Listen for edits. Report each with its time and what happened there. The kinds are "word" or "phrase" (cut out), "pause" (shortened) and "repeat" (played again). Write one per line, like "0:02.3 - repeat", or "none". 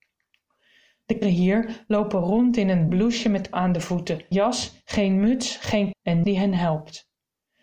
0:01.2 - word
0:02.9 - word
0:03.5 - word
0:04.3 - word
0:05.9 - word
0:06.2 - word